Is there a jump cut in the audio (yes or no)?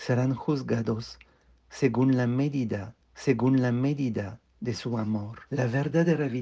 yes